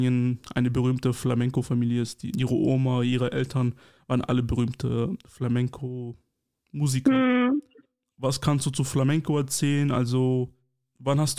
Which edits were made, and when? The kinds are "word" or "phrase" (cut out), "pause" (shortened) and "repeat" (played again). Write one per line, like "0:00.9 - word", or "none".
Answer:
0:02.3 - word